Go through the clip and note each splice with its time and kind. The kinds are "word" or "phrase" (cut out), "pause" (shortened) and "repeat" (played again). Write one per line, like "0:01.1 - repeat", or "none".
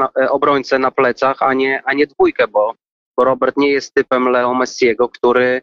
none